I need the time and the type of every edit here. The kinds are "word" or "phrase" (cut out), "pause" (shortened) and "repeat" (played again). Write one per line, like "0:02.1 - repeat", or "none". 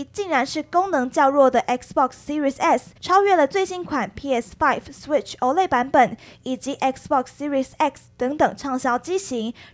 0:03.0 - pause